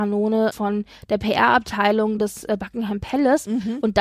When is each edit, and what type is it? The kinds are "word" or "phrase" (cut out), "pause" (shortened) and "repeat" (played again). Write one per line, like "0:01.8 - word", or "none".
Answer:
none